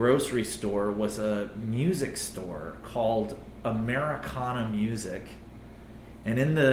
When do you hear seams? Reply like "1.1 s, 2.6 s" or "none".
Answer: none